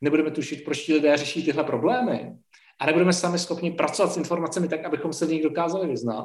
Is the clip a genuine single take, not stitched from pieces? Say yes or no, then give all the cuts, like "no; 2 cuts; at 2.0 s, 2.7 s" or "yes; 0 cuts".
yes; 0 cuts